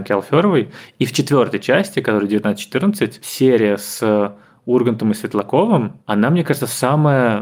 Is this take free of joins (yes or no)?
yes